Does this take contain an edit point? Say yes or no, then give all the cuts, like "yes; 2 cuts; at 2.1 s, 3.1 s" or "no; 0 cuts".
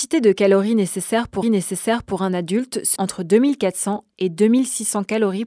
yes; 2 cuts; at 1.4 s, 3.0 s